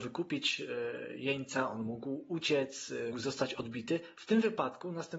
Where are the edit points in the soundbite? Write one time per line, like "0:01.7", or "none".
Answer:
0:03.1